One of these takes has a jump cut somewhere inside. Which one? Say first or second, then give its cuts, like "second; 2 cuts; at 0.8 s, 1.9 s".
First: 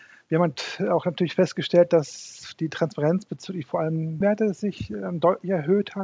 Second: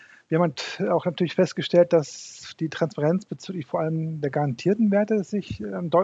first; 1 cut; at 4.2 s